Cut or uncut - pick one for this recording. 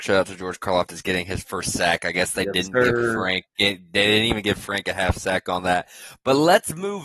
uncut